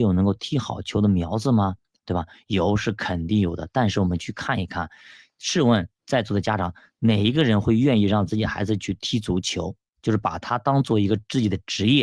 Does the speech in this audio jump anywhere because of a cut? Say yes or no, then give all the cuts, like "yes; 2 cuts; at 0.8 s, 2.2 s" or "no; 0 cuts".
no; 0 cuts